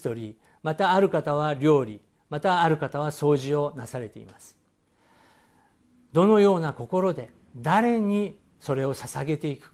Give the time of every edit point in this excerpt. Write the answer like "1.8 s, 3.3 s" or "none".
none